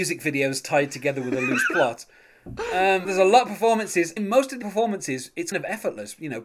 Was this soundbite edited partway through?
yes; 4 cuts; at 3.0 s, 4.2 s, 4.6 s, 5.5 s

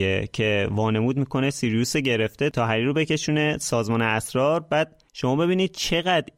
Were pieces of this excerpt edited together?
yes; 1 cut; at 5.1 s

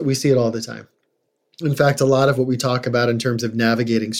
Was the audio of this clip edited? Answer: no; 0 cuts

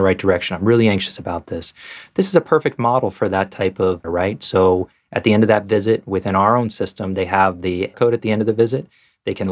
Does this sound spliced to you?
yes; 2 cuts; at 4.0 s, 7.9 s

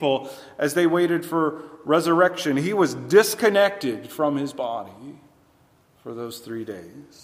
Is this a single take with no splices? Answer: yes; 0 cuts

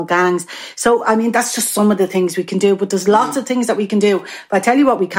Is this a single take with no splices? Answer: yes; 0 cuts

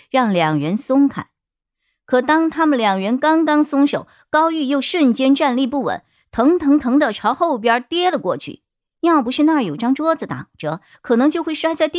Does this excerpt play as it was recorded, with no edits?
yes; 0 cuts

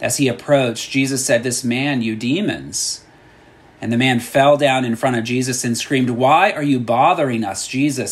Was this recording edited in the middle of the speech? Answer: yes; 1 cut; at 1.4 s

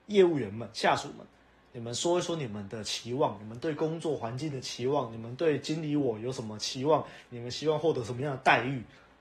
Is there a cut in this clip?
no; 0 cuts

